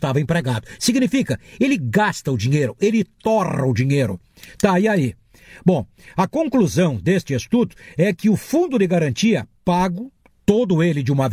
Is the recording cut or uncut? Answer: uncut